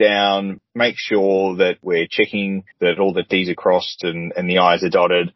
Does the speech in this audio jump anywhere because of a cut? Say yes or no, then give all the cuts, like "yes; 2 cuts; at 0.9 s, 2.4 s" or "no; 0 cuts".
yes; 1 cut; at 2.7 s